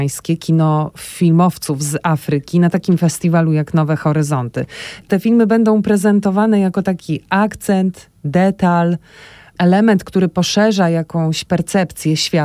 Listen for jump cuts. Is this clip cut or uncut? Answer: uncut